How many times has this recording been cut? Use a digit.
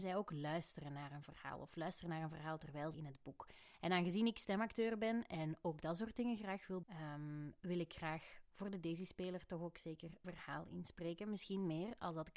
3